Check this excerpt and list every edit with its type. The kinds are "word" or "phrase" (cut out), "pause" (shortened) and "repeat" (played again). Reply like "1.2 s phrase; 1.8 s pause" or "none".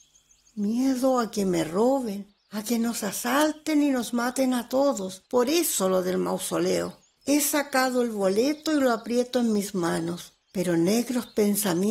2.4 s pause; 5.3 s pause; 10.4 s pause

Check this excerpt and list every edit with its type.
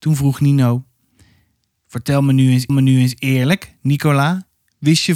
2.7 s repeat

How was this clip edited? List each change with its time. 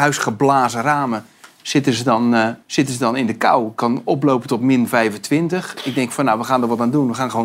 2.6 s pause

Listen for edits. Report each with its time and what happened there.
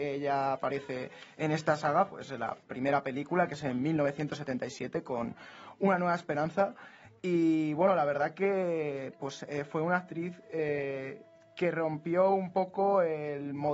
none

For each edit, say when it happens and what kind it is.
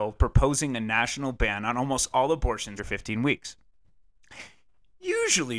2.8 s word

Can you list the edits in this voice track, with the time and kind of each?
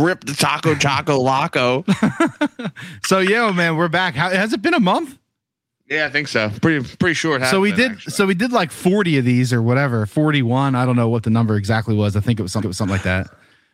12.6 s repeat

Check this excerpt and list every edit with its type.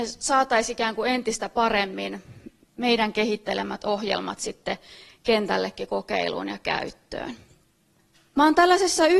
none

